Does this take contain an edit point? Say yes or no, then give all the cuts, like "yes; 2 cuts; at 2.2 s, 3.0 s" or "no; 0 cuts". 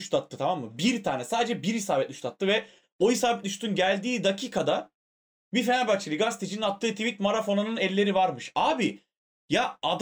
no; 0 cuts